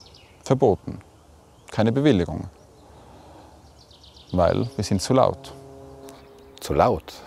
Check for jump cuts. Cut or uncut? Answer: uncut